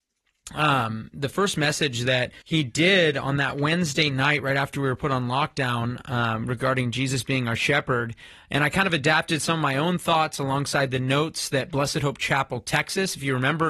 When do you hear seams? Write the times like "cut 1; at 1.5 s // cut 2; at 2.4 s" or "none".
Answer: cut 1; at 2.4 s